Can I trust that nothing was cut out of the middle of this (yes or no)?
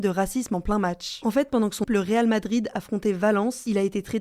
no